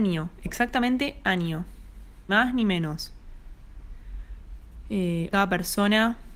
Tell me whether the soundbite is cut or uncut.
cut